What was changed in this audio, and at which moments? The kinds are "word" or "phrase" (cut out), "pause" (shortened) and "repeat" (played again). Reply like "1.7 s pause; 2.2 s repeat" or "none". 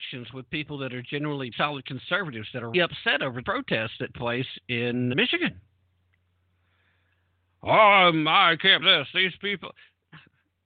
1.5 s word; 2.7 s word; 3.4 s word; 4.1 s word; 5.1 s word; 8.8 s word